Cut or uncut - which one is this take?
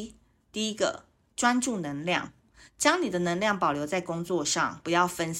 uncut